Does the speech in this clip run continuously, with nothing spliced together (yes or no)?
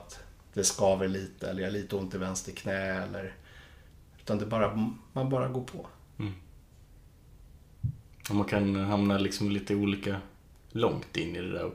yes